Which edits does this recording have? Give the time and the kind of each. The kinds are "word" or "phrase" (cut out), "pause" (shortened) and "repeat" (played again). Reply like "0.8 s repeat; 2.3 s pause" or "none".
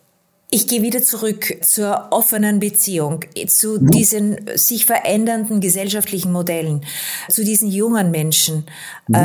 1.6 s word; 7.3 s word